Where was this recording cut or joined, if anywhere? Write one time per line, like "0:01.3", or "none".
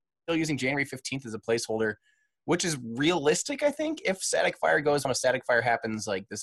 0:05.0

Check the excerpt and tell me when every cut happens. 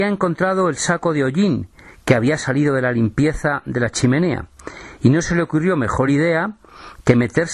none

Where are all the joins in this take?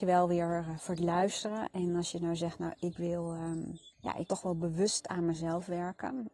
0:03.9
0:04.3

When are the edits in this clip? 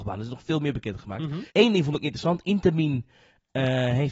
0:01.5

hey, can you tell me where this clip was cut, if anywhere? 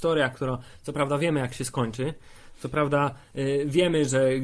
none

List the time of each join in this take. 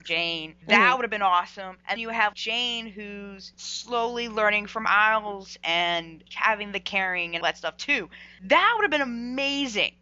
0:02.0
0:02.3
0:07.4

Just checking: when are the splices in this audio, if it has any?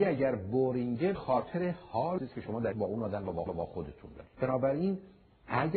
0:01.1
0:02.2
0:02.7
0:03.5
0:04.3

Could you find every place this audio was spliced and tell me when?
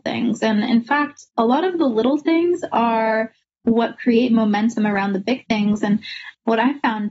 0:01.3

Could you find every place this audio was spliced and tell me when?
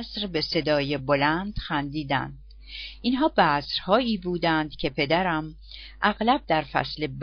none

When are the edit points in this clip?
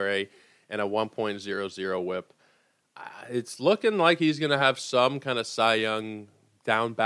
none

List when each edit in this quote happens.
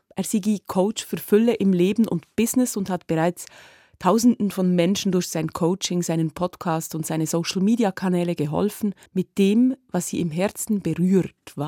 0:09.1

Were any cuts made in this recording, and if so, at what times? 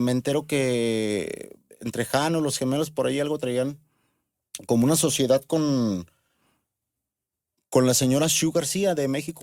none

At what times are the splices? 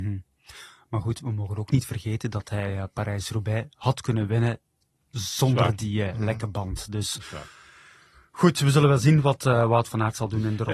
none

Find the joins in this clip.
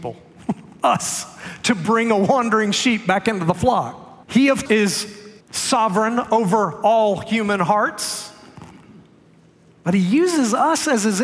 0:04.2
0:04.7
0:05.4

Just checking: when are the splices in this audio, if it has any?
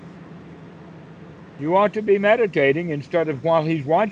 0:01.3

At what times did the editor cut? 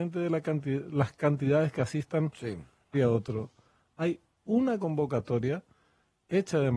0:02.9

